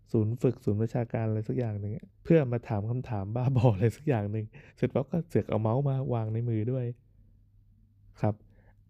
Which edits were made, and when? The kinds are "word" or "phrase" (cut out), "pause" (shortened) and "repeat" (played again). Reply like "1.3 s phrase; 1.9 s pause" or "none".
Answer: 2.1 s pause; 4.7 s pause